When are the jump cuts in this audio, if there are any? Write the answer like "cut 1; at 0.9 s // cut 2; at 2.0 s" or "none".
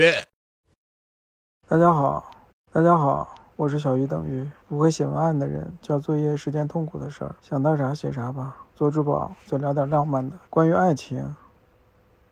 cut 1; at 2.5 s // cut 2; at 4.6 s // cut 3; at 7.4 s // cut 4; at 8.7 s // cut 5; at 10.5 s